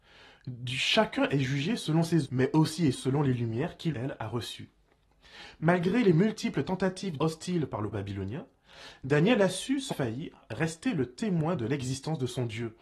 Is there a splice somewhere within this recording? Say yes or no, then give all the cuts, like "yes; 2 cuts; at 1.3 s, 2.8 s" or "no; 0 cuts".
yes; 6 cuts; at 2.2 s, 2.9 s, 3.9 s, 7.2 s, 7.9 s, 9.9 s